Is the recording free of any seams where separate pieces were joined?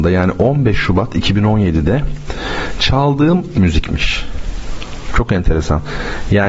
no; 1 cut; at 3.5 s

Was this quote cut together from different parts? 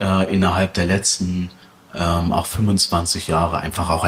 no; 0 cuts

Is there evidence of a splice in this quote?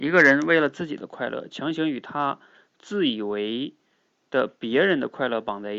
no; 0 cuts

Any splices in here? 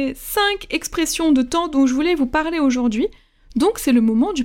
no; 0 cuts

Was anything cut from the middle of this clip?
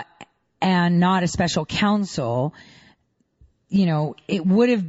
no; 0 cuts

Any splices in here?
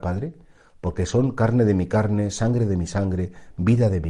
no; 0 cuts

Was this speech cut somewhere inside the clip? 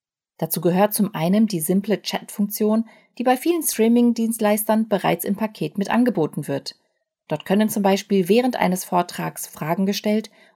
no; 0 cuts

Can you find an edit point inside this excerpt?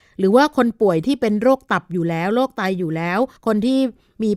yes; 1 cut; at 3.4 s

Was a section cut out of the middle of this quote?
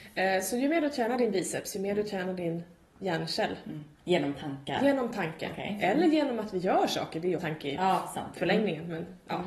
yes; 2 cuts; at 3.9 s, 7.4 s

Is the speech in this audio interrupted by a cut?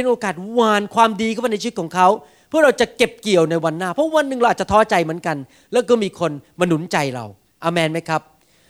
no; 0 cuts

